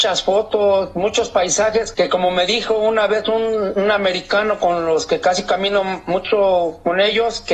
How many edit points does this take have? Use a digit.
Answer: 1